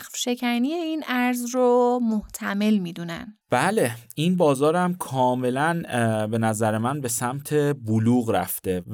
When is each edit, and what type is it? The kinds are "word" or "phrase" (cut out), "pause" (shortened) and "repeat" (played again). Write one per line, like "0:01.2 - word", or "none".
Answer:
0:03.4 - pause

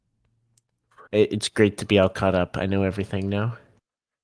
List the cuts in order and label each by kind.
0:01.1 - pause

